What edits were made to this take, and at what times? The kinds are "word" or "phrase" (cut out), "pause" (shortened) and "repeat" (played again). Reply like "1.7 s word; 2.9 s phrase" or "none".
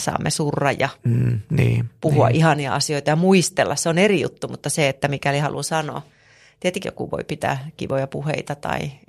6.8 s word